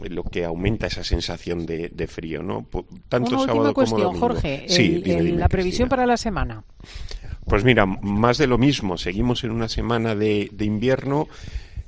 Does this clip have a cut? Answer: no; 0 cuts

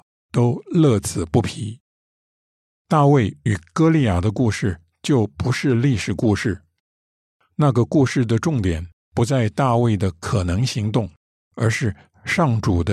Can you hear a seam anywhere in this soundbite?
yes; 1 cut; at 11.2 s

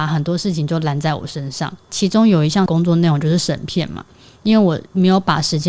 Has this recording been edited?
no; 0 cuts

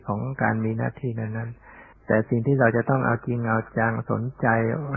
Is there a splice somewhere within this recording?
yes; 1 cut; at 1.9 s

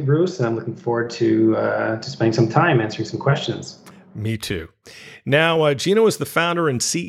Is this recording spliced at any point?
no; 0 cuts

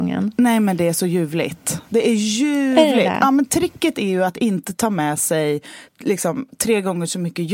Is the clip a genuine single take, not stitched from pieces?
no; 1 cut; at 5.9 s

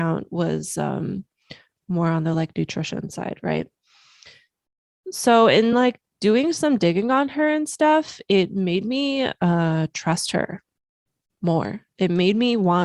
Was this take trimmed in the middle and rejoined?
no; 0 cuts

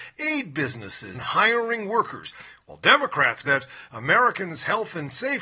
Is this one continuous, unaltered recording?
no; 2 cuts; at 1.1 s, 3.4 s

